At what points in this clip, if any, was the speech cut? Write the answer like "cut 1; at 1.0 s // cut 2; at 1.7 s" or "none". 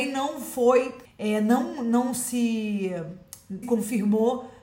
cut 1; at 1.0 s // cut 2; at 3.6 s